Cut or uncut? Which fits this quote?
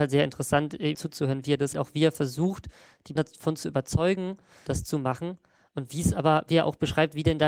cut